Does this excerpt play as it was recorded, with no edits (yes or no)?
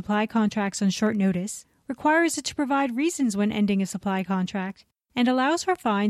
yes